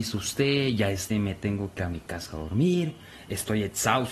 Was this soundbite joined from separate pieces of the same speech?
yes; 2 cuts; at 1.1 s, 1.8 s

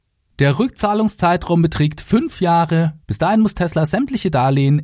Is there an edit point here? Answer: yes; 1 cut; at 3.0 s

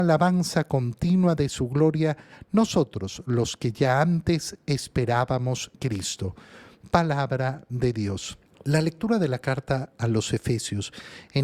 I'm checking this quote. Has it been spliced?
yes; 2 cuts; at 5.7 s, 8.5 s

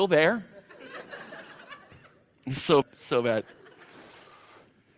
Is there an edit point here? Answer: yes; 1 cut; at 2.8 s

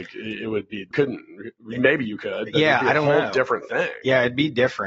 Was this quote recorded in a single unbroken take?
no; 2 cuts; at 0.9 s, 1.6 s

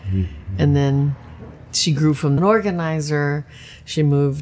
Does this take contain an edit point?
yes; 1 cut; at 2.4 s

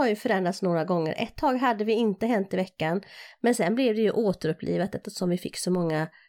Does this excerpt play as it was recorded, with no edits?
yes; 0 cuts

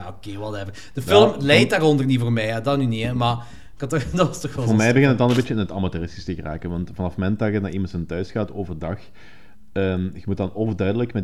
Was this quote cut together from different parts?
no; 0 cuts

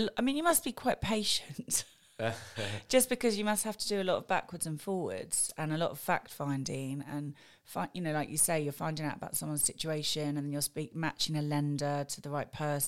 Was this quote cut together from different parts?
no; 0 cuts

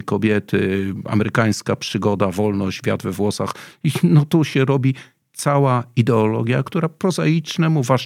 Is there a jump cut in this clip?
no; 0 cuts

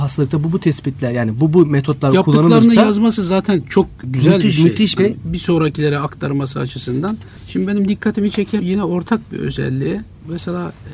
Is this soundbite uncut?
no; 2 cuts; at 5.0 s, 8.6 s

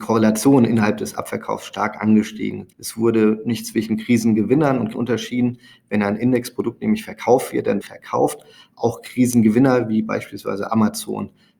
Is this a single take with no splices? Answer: no; 3 cuts; at 2.7 s, 4.9 s, 7.8 s

